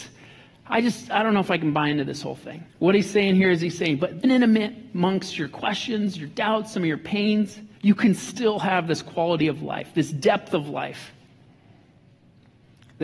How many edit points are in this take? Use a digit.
3